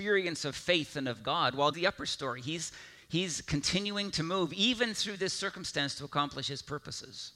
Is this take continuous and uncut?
no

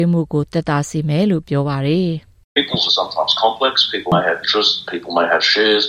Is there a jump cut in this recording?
yes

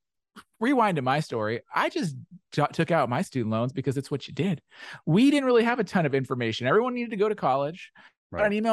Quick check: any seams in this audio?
no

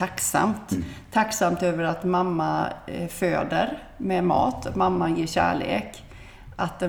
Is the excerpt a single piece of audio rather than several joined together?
yes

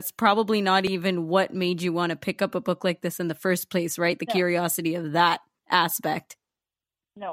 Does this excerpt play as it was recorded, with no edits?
yes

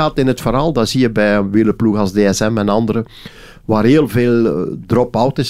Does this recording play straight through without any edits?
yes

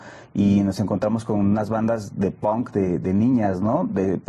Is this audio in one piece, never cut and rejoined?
yes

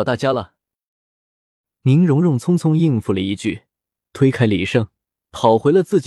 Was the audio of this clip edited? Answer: no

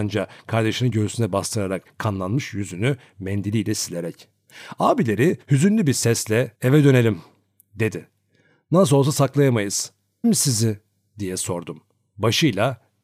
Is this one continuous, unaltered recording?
no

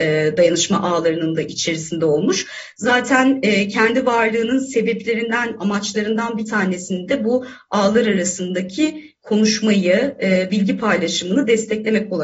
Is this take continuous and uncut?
yes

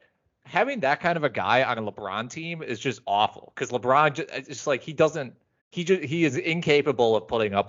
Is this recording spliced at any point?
yes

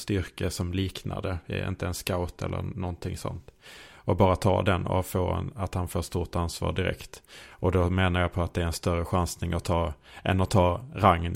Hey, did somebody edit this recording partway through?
no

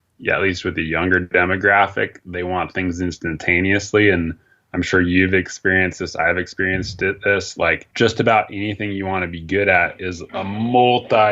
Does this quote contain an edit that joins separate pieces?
yes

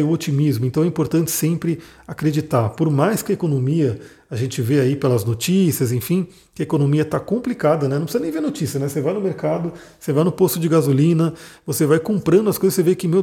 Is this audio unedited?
yes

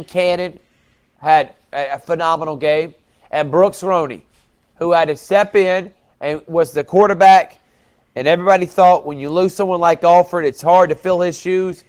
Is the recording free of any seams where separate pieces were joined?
yes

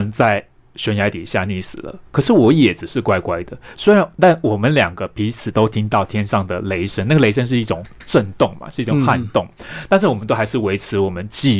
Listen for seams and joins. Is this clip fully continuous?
yes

